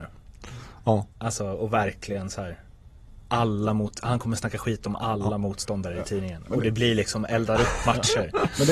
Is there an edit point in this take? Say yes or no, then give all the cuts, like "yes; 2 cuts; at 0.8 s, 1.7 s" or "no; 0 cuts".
yes; 2 cuts; at 1.1 s, 3.2 s